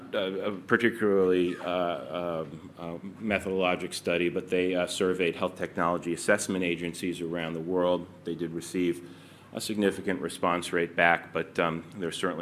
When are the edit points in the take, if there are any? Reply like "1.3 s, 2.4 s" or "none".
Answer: none